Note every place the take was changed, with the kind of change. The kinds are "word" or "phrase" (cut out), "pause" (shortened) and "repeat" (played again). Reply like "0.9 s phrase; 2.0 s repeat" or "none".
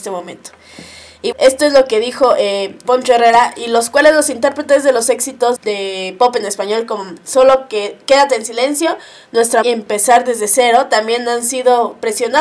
1.3 s word; 2.8 s word; 5.6 s word; 9.6 s word